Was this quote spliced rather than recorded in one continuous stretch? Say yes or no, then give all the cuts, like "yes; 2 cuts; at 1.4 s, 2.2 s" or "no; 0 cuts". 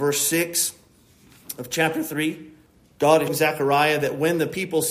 yes; 2 cuts; at 2.7 s, 3.3 s